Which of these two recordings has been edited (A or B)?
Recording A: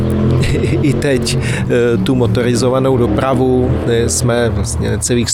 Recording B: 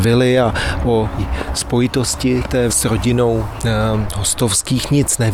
B